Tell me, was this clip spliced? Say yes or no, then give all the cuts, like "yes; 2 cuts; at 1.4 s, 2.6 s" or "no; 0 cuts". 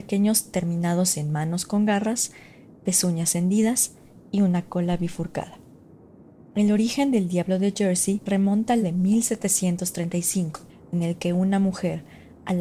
yes; 3 cuts; at 8.3 s, 8.8 s, 10.7 s